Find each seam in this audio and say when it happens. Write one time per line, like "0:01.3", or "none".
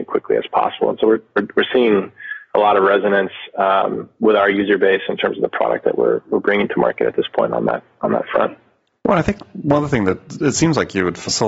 none